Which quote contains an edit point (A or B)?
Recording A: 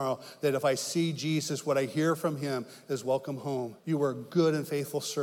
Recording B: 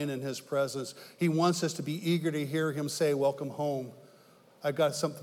A